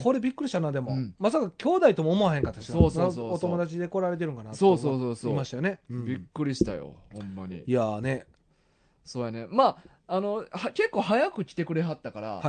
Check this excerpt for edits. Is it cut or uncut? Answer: uncut